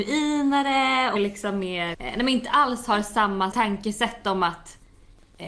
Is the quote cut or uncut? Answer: cut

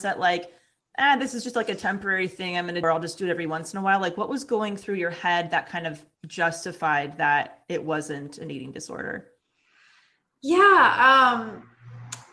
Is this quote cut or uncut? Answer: cut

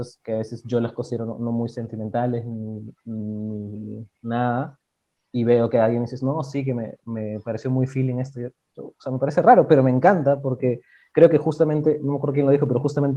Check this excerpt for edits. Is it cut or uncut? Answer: uncut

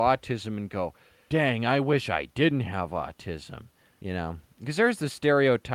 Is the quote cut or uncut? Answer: uncut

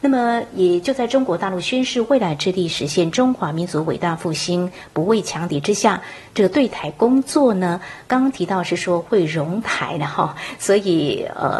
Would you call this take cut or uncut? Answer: uncut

